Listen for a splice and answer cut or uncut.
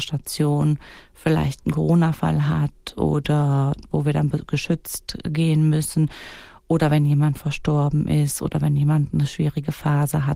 uncut